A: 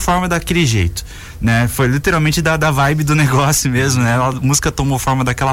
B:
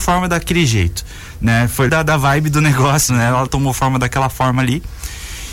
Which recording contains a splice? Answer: B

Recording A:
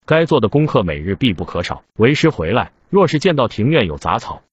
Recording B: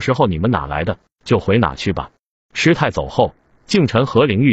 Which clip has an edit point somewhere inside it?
A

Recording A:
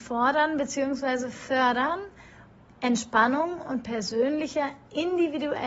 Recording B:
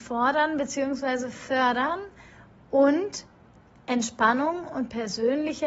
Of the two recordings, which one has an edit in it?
A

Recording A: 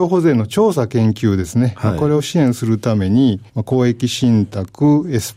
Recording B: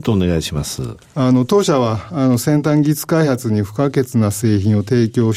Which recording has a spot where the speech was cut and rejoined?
A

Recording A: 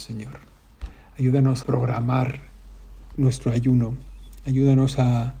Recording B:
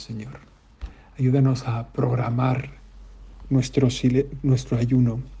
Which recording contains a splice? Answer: A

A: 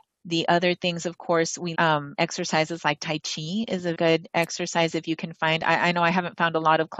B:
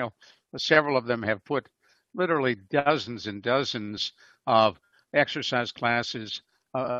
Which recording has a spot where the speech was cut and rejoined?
A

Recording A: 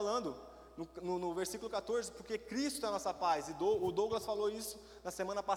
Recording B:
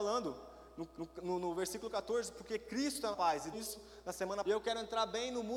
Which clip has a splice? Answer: B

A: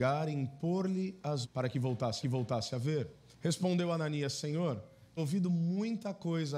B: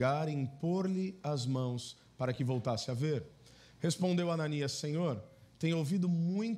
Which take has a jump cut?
A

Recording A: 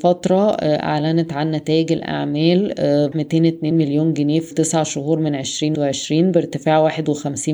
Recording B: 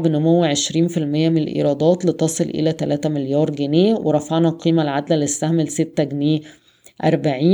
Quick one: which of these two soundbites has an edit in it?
A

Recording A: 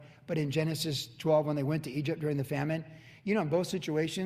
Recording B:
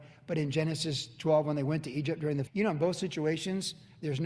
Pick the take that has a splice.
B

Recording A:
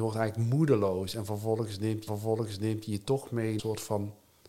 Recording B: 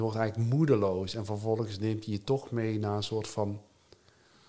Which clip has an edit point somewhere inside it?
A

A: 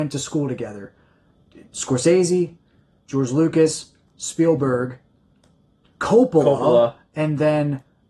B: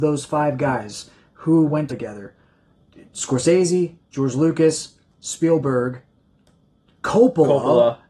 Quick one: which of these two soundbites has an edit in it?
B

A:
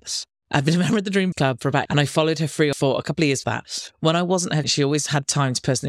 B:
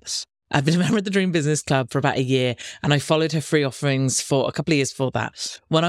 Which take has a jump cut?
A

